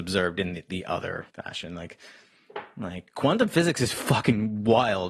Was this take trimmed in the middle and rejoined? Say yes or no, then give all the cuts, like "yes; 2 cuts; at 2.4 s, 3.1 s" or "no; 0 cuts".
yes; 1 cut; at 1.3 s